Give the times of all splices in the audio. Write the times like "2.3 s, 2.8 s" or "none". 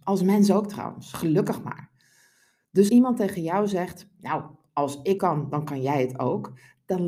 2.9 s, 5.2 s